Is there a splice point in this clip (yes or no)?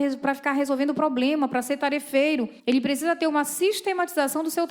yes